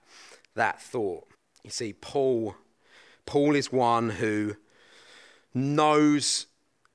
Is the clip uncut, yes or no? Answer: no